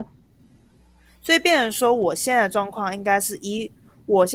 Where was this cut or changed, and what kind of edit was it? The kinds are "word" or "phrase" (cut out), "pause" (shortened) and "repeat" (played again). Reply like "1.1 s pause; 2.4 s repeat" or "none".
none